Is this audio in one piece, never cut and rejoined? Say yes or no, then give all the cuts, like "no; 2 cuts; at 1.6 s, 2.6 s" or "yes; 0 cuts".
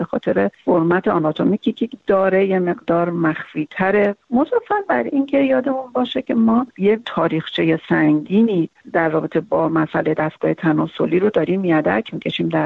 yes; 0 cuts